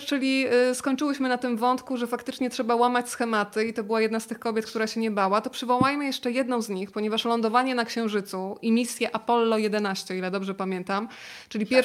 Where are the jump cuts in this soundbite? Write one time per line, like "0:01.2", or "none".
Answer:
none